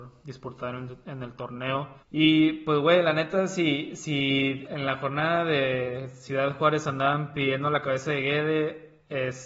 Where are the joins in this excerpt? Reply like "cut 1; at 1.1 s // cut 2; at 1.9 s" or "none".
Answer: cut 1; at 2.0 s // cut 2; at 4.7 s